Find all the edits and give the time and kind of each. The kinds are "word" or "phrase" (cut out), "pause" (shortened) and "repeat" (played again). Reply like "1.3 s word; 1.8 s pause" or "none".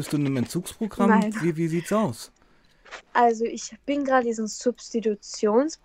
3.1 s pause; 4.2 s word